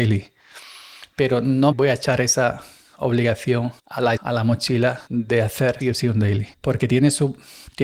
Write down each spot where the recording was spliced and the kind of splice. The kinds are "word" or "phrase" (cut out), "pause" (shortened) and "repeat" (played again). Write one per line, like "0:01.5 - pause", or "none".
0:01.7 - word
0:03.8 - pause
0:04.2 - word
0:05.1 - pause
0:05.8 - word
0:06.5 - pause